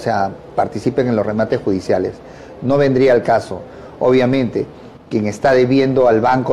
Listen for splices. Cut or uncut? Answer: uncut